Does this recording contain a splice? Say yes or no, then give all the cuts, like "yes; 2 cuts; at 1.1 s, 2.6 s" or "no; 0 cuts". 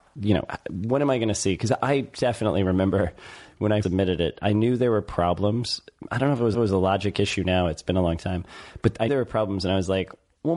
yes; 3 cuts; at 3.8 s, 6.5 s, 9.1 s